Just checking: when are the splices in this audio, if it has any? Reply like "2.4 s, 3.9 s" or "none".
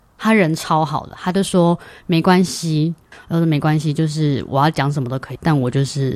none